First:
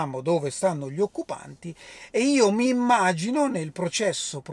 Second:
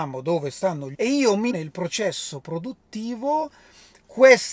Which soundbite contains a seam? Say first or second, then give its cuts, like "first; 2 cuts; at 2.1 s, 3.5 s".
second; 2 cuts; at 0.9 s, 1.5 s